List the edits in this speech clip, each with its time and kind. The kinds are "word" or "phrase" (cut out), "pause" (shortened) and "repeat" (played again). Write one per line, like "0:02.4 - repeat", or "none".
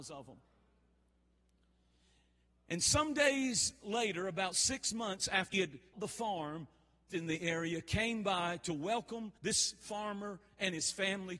0:05.5 - word
0:05.9 - word
0:07.1 - phrase
0:09.4 - pause